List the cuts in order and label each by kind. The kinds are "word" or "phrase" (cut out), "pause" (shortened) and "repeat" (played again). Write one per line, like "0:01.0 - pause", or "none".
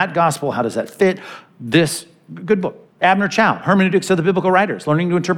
0:02.9 - pause